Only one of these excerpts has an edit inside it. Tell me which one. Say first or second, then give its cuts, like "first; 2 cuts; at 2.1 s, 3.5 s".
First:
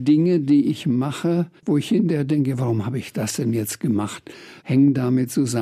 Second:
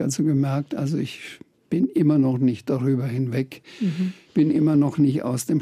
first; 2 cuts; at 1.6 s, 4.6 s